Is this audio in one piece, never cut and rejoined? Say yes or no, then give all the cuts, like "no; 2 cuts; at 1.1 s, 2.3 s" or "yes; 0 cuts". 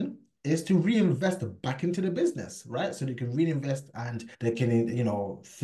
no; 1 cut; at 4.3 s